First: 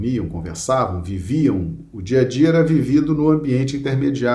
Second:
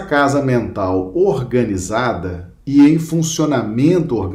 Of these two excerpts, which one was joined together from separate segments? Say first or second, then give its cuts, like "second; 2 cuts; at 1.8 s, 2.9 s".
second; 1 cut; at 2.6 s